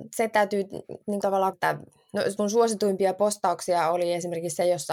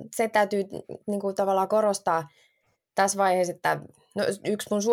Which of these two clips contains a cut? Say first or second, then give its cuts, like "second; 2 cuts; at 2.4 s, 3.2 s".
first; 3 cuts; at 1.2 s, 1.5 s, 2.4 s